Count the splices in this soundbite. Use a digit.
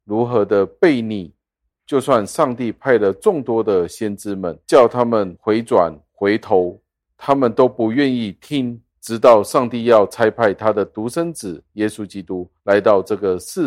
4